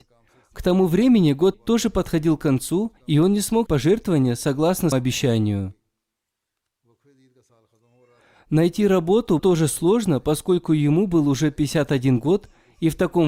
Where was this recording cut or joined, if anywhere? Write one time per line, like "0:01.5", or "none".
0:01.5
0:03.0
0:03.7
0:04.9
0:09.4